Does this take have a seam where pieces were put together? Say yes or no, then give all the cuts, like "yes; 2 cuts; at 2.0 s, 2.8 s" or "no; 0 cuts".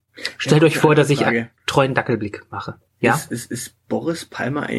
yes; 2 cuts; at 1.6 s, 3.8 s